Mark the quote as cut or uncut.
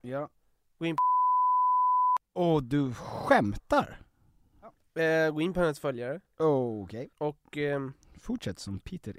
cut